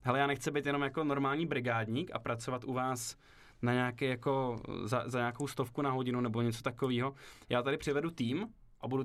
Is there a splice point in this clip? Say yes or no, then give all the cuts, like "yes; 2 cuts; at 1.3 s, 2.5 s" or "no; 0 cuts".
no; 0 cuts